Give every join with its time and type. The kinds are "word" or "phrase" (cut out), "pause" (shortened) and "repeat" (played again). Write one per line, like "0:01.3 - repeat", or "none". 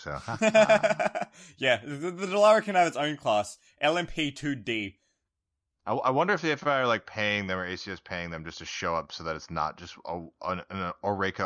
none